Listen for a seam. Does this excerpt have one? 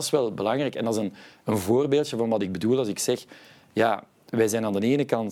no; 0 cuts

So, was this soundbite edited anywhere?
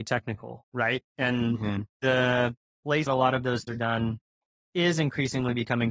yes; 4 cuts; at 1.9 s, 3.1 s, 3.7 s, 4.4 s

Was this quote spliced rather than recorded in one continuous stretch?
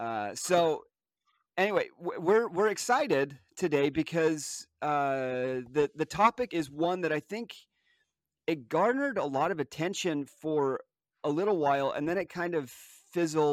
yes; 1 cut; at 6.5 s

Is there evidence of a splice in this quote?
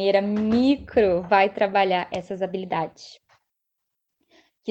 no; 0 cuts

